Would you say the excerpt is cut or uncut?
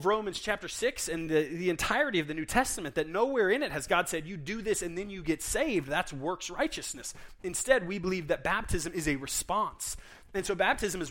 uncut